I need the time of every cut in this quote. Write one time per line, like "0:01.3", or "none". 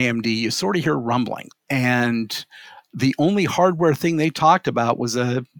none